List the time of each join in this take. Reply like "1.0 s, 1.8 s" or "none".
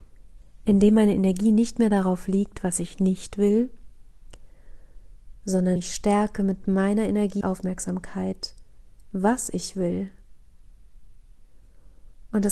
5.8 s, 7.4 s